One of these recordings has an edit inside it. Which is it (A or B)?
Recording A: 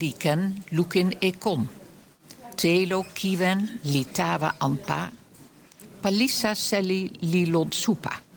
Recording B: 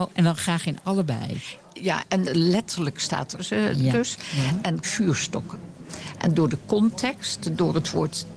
B